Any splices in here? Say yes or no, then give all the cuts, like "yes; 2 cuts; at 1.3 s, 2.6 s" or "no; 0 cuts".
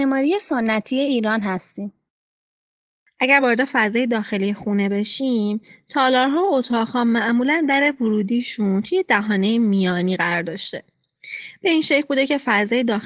no; 0 cuts